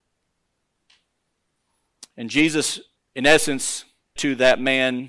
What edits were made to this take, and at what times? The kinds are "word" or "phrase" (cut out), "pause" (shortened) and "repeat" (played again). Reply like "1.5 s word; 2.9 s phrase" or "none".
3.0 s pause; 4.2 s word